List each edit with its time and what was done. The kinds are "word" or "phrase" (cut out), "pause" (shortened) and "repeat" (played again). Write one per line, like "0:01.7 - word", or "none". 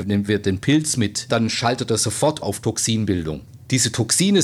0:01.3 - phrase
0:02.4 - word